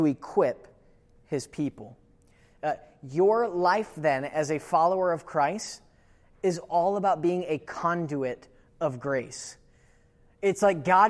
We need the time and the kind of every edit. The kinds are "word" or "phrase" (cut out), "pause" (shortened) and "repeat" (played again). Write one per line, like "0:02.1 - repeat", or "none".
none